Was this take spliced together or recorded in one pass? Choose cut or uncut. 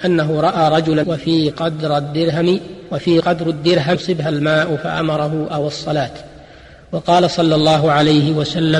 cut